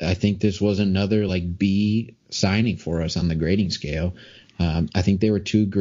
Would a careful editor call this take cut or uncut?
uncut